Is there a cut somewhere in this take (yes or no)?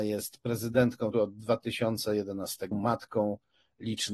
yes